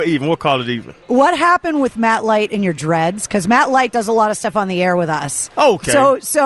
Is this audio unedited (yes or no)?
no